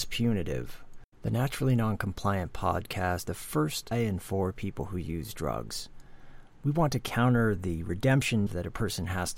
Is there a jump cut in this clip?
yes; 4 cuts; at 1.1 s, 3.2 s, 3.9 s, 8.5 s

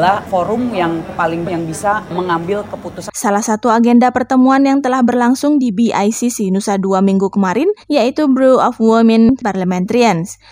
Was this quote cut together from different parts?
yes; 2 cuts; at 1.4 s, 7.8 s

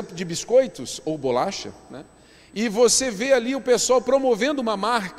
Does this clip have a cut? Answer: no; 0 cuts

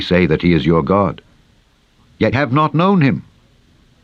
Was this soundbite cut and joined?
yes; 1 cut; at 2.3 s

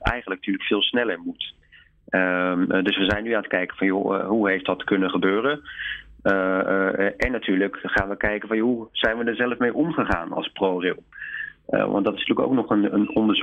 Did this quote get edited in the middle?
no; 0 cuts

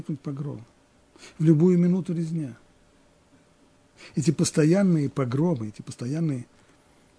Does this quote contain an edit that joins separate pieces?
no; 0 cuts

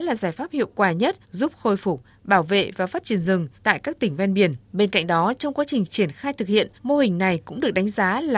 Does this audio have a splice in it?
yes; 4 cuts; at 1.2 s, 3.5 s, 4.6 s, 6.8 s

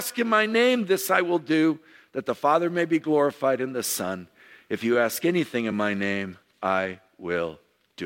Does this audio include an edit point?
no; 0 cuts

